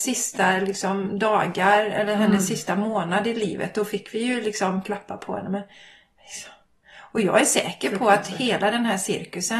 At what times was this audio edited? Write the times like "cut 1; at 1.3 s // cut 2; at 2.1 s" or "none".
none